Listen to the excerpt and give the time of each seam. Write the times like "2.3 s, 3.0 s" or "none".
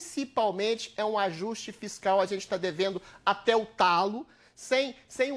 none